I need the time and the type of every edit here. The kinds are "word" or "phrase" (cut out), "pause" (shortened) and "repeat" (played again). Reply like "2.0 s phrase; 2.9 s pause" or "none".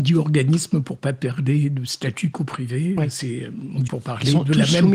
2.3 s word; 3.9 s word